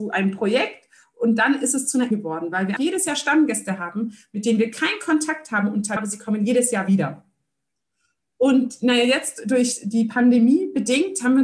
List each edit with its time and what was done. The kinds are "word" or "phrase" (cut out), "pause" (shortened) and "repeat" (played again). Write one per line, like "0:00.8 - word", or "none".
0:02.1 - word
0:02.8 - word
0:06.0 - word